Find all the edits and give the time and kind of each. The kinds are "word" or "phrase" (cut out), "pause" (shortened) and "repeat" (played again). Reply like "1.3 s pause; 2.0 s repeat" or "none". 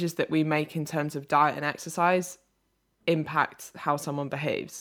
none